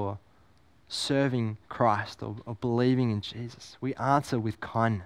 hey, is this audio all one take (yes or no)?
no